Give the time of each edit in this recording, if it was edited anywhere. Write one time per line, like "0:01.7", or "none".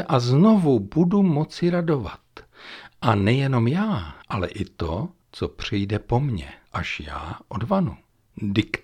0:04.2